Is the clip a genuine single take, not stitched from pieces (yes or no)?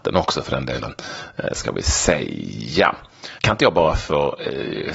no